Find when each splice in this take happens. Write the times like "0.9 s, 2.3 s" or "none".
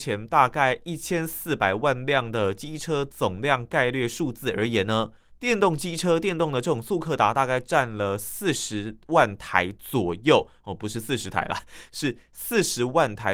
5.3 s